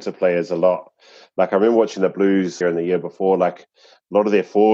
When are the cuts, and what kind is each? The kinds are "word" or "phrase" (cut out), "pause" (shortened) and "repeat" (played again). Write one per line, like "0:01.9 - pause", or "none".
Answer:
0:02.6 - phrase